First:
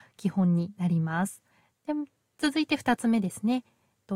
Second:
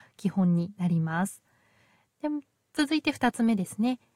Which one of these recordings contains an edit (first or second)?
first